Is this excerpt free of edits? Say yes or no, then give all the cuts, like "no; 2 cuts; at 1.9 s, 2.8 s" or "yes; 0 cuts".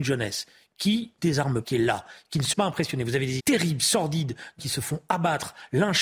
no; 5 cuts; at 1.2 s, 1.6 s, 2.5 s, 3.4 s, 4.6 s